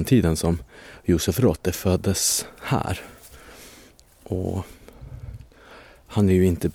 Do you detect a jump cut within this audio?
no; 0 cuts

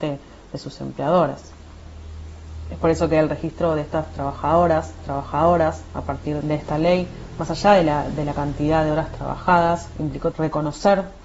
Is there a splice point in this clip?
yes; 3 cuts; at 5.0 s, 6.4 s, 10.3 s

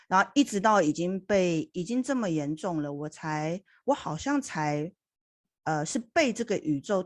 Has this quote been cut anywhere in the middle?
no; 0 cuts

